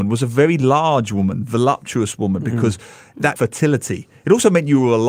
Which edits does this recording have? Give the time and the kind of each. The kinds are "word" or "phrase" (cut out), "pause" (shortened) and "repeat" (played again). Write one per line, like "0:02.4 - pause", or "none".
0:03.4 - word